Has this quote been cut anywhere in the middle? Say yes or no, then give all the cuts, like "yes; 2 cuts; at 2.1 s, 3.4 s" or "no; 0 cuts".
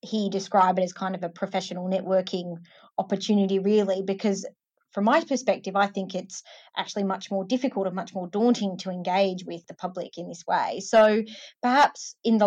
no; 0 cuts